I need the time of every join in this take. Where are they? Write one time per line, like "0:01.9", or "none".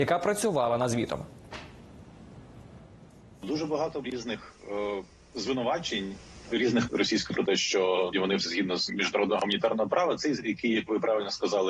0:04.0
0:06.5
0:06.9
0:07.3
0:08.1
0:08.4
0:08.9
0:10.4